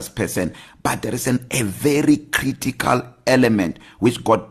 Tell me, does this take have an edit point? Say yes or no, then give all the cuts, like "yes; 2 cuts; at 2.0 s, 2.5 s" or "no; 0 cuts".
no; 0 cuts